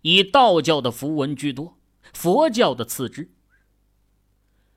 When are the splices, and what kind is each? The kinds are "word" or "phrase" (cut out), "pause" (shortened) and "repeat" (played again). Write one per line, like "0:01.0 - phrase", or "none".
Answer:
none